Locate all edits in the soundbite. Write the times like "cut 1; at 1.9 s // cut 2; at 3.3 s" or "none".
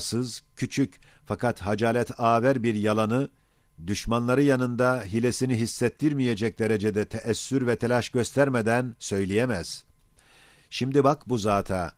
none

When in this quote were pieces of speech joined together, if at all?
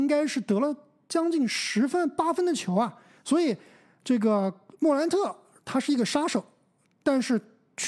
none

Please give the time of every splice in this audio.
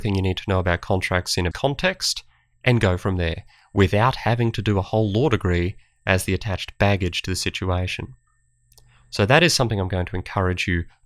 cut 1; at 1.5 s

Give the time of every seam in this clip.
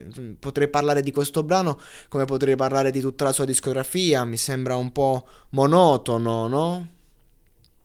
none

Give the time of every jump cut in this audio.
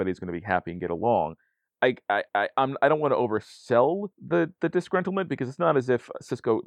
cut 1; at 2.3 s // cut 2; at 4.1 s

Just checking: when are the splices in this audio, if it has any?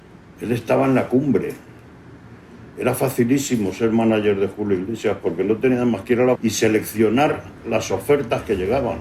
cut 1; at 6.4 s

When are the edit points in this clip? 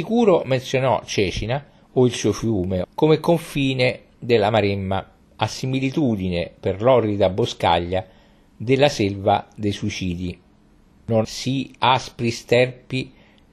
cut 1; at 2.8 s // cut 2; at 11.2 s

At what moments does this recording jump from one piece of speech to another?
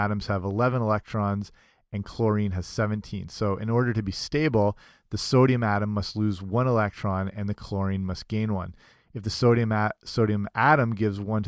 none

